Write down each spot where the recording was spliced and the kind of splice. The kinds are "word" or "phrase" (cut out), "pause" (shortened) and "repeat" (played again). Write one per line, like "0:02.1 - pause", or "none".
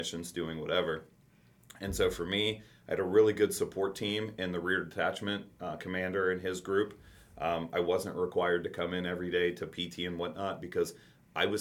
none

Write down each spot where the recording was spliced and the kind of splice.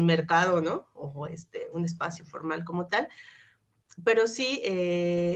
none

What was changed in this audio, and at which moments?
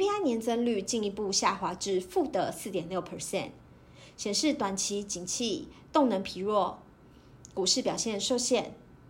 none

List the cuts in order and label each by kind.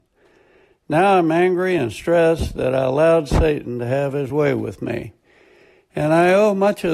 none

